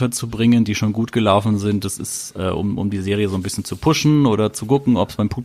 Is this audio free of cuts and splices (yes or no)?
yes